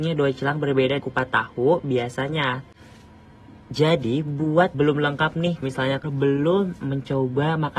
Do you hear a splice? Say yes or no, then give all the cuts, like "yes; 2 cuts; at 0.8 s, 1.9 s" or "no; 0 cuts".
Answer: yes; 4 cuts; at 1.0 s, 4.7 s, 5.6 s, 6.0 s